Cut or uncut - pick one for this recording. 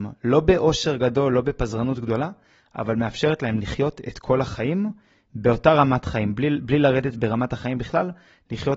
uncut